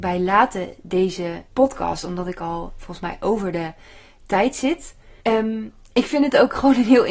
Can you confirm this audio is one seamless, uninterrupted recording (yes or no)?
no